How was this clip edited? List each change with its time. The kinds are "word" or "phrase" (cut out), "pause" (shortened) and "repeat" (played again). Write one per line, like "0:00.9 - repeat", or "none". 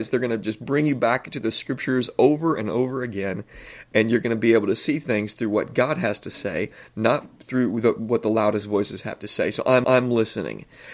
0:09.8 - repeat